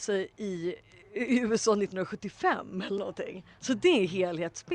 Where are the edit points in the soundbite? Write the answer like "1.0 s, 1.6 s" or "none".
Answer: 3.5 s